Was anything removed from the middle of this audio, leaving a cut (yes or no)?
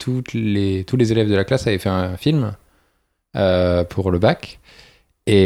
no